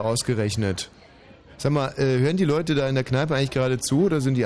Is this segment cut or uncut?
uncut